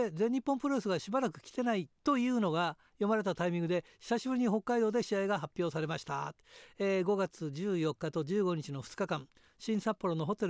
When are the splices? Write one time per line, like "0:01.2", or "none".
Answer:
0:02.0

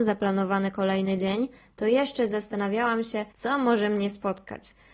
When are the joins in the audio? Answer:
0:03.3

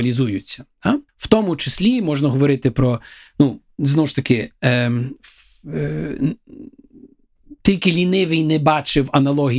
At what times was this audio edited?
0:01.1

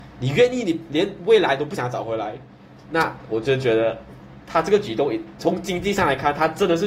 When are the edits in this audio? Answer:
none

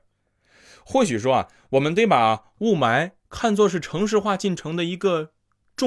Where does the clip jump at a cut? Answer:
0:03.2

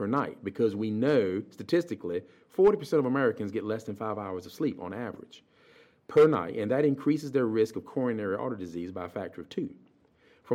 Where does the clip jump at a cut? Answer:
none

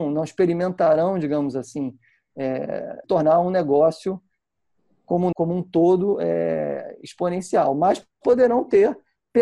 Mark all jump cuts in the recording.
0:03.0
0:05.3

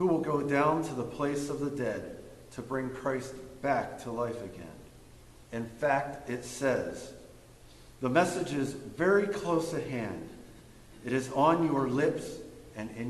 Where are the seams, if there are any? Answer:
0:05.5
0:08.0

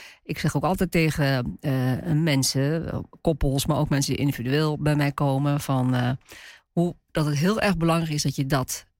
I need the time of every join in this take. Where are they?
none

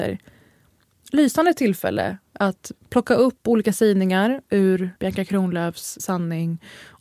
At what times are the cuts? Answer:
0:02.8
0:05.0
0:06.0

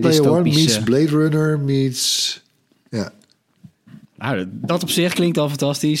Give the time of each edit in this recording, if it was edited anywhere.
0:04.0

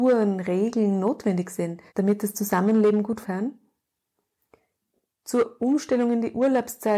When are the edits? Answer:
0:01.9
0:03.2

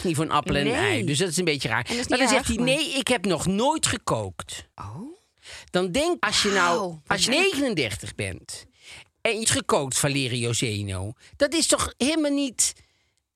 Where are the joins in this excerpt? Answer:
0:04.7
0:06.2
0:07.3
0:09.4

